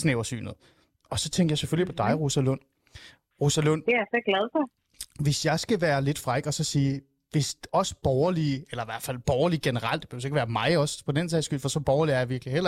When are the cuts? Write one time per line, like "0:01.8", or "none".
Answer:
none